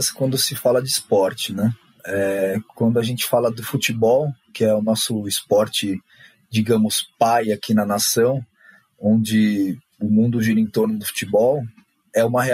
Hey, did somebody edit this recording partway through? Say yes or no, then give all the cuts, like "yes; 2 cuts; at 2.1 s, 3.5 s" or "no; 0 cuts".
no; 0 cuts